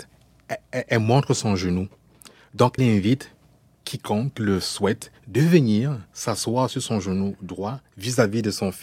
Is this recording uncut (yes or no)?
no